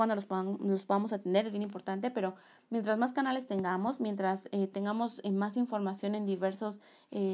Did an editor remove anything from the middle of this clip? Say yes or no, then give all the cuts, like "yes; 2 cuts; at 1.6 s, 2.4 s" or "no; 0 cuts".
no; 0 cuts